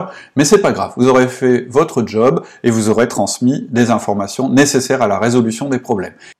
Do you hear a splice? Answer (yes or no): no